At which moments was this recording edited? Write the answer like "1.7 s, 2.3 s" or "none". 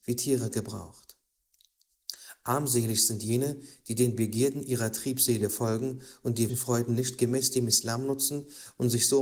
6.5 s